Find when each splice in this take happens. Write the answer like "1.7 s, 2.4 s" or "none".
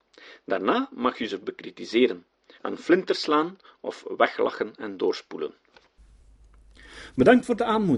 none